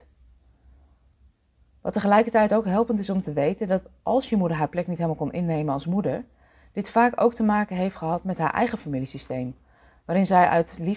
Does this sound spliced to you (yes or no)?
no